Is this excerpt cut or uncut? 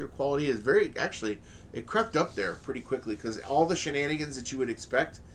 uncut